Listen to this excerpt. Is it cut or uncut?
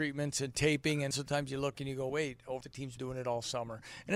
cut